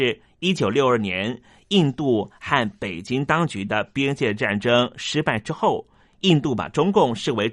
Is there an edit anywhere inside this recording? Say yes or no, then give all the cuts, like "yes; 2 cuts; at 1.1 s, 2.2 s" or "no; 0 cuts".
no; 0 cuts